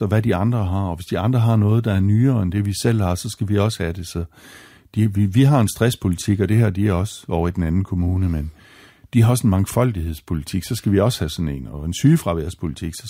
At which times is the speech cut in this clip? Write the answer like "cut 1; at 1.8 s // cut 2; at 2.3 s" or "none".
none